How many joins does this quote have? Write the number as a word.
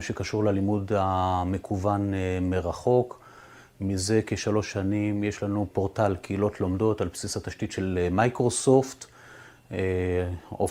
one